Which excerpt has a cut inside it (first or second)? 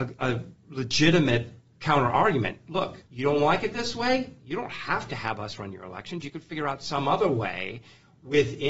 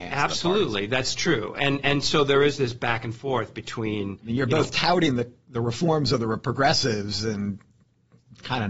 first